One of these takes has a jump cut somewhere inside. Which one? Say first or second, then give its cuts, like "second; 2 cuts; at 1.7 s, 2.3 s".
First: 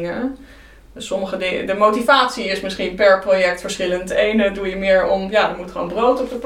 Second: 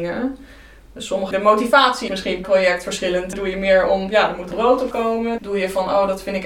second; 7 cuts; at 1.3 s, 2.1 s, 2.4 s, 3.3 s, 4.5 s, 4.9 s, 5.4 s